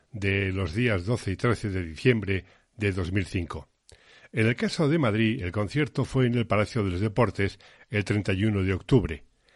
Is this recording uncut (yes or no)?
yes